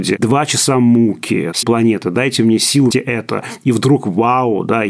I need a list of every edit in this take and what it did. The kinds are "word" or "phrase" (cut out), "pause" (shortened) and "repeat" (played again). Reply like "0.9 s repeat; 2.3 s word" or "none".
1.6 s word; 2.9 s word